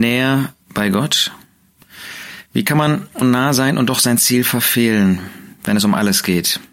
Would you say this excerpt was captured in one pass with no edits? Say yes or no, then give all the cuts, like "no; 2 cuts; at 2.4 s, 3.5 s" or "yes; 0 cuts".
no; 1 cut; at 3.2 s